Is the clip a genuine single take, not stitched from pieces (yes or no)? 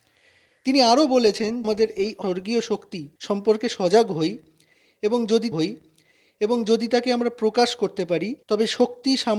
no